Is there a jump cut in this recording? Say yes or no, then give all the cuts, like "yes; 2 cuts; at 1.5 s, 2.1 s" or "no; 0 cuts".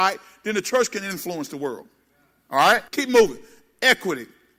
yes; 1 cut; at 2.9 s